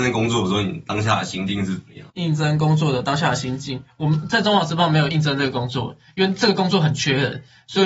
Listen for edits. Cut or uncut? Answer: cut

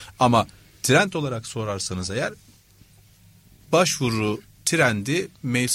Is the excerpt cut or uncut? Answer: uncut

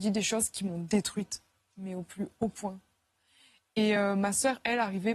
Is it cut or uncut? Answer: uncut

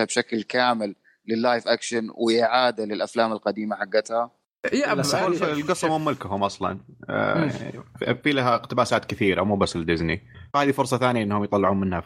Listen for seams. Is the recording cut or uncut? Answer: uncut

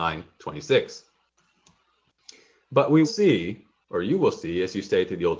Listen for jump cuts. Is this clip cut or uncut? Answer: cut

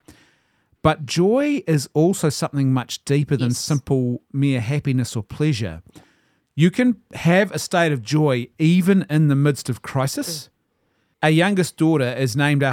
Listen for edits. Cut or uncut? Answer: uncut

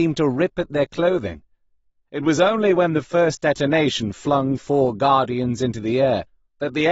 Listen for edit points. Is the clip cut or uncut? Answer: uncut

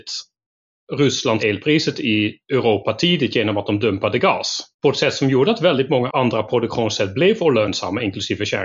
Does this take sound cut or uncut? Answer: cut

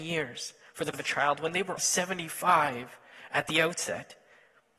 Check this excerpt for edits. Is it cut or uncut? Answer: cut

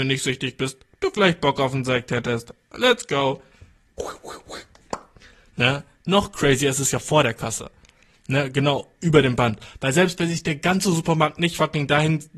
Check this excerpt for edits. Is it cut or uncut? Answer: uncut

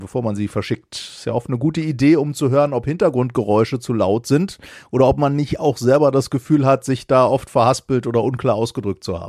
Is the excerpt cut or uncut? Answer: uncut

